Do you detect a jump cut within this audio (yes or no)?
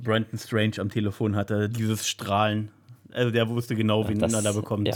no